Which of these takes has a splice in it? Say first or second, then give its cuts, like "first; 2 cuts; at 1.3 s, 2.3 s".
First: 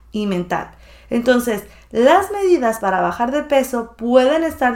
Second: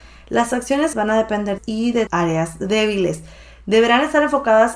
second; 3 cuts; at 0.9 s, 1.6 s, 2.1 s